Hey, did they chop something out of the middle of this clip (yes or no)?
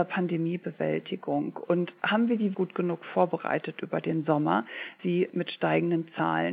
yes